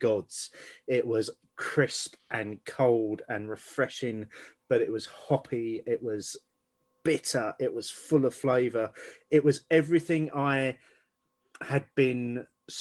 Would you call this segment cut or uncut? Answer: uncut